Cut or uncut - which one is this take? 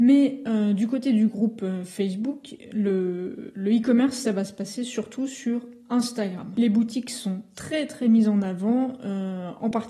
uncut